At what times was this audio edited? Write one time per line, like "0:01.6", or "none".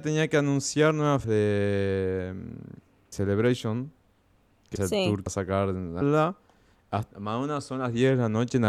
0:01.2
0:03.1
0:04.8
0:05.3
0:06.0
0:07.1